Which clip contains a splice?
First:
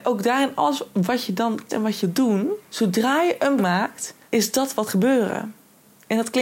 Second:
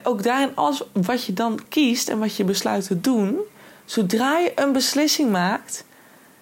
first; 6 cuts; at 1.7 s, 2.0 s, 2.6 s, 3.6 s, 4.2 s, 4.9 s

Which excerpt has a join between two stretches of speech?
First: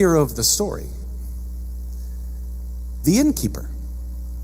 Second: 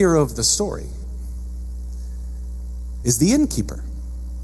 first; 1 cut; at 3.0 s

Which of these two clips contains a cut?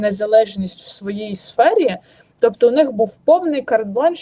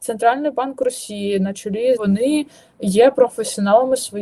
second; 1 cut; at 2.0 s

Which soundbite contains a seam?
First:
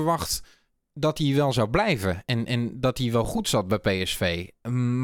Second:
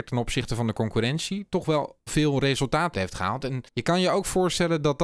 second; 3 cuts; at 2.1 s, 2.9 s, 3.7 s

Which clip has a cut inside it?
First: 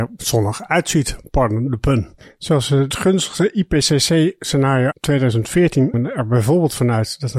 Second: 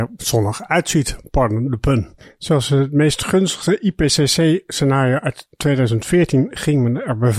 first; 3 cuts; at 2.9 s, 4.9 s, 5.9 s

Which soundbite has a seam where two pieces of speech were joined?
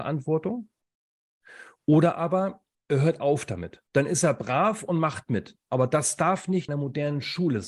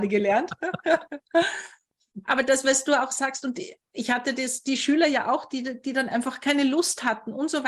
first; 3 cuts; at 2.7 s, 3.9 s, 6.7 s

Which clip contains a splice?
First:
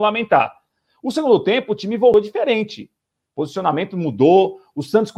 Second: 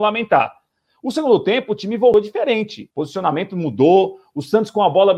second; 1 cut; at 2.9 s

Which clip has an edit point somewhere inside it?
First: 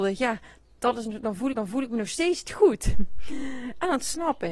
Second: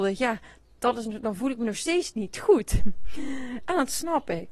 first; 2 cuts; at 1.5 s, 2.4 s

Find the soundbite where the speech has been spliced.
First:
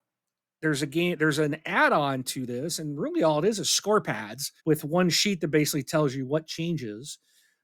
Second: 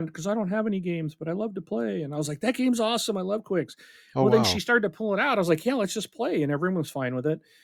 first; 1 cut; at 4.6 s

